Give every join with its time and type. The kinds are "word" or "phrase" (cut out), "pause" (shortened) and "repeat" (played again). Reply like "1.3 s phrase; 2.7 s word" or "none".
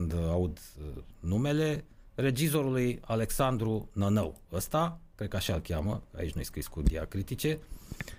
none

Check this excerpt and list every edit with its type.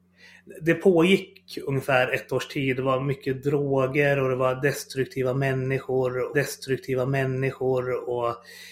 6.3 s repeat

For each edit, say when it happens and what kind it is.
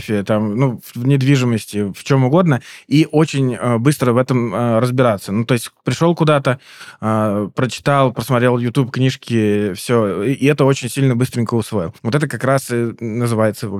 12.0 s pause

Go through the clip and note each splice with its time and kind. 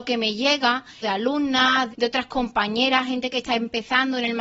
1.0 s phrase; 1.9 s phrase

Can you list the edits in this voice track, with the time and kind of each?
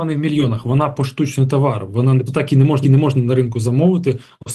2.3 s word; 2.8 s repeat

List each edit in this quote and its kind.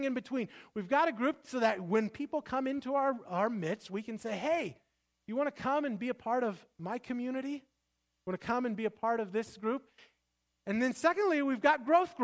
none

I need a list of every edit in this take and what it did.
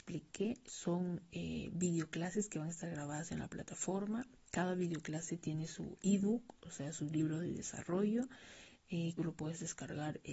9.2 s phrase

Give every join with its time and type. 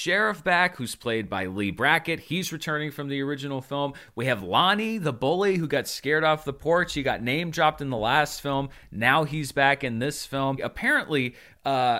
none

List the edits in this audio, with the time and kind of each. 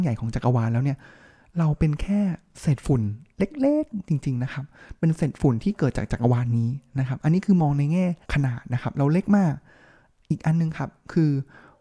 8.2 s pause

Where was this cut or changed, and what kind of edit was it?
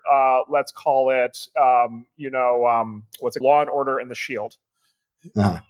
3.4 s word

